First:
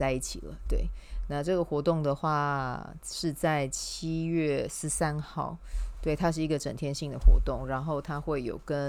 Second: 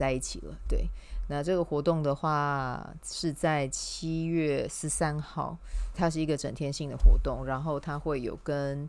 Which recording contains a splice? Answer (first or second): second